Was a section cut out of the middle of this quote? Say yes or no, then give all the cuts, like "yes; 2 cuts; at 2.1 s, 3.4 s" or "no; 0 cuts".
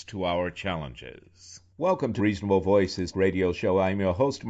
yes; 3 cuts; at 1.7 s, 2.2 s, 3.1 s